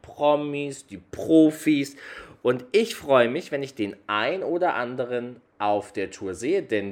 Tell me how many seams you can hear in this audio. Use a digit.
0